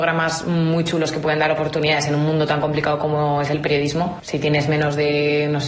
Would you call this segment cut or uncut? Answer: uncut